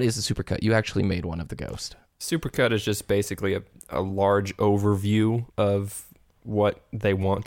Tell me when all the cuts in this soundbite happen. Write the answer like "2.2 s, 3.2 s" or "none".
5.5 s